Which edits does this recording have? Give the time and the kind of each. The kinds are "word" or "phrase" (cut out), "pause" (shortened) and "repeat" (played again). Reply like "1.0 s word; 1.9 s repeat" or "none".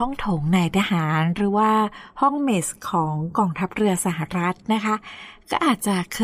none